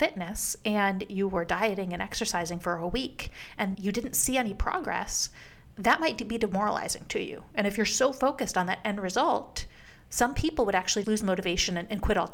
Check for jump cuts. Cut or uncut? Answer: cut